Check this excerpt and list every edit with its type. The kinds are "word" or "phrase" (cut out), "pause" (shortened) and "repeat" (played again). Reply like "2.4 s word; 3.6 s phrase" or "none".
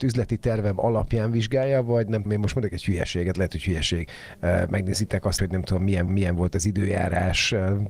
2.3 s word; 5.4 s word; 6.1 s repeat